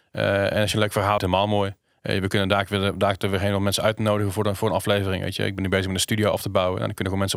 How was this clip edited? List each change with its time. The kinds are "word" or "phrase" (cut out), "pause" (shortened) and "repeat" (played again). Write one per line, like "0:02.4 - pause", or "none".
0:01.2 - phrase
0:01.9 - pause